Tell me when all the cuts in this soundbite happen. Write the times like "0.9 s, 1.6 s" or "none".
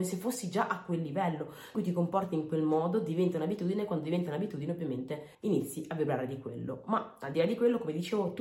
1.7 s, 5.3 s